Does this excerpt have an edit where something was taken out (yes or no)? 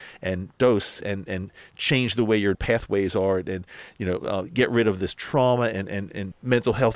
yes